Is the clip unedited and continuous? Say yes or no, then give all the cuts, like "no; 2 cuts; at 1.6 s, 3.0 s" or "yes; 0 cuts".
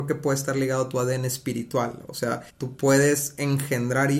no; 1 cut; at 2.5 s